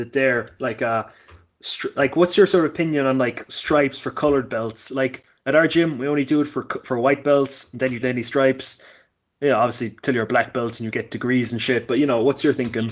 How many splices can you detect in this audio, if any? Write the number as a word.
one